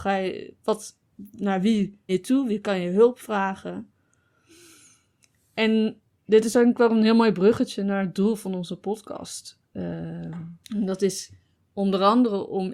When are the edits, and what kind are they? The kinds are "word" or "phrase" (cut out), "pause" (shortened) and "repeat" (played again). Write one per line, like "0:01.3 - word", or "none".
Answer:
0:02.1 - word
0:10.6 - pause